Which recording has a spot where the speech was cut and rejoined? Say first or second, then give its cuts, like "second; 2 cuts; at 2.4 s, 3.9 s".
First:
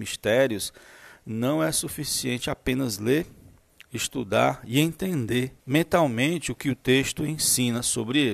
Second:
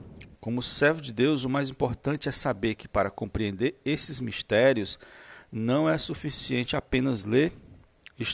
first; 1 cut; at 5.6 s